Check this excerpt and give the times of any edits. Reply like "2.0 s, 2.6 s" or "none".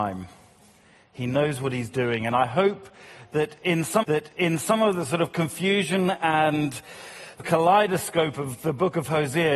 4.0 s, 7.4 s